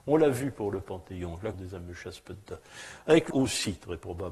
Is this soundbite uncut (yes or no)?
no